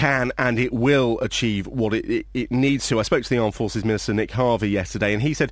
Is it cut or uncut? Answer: uncut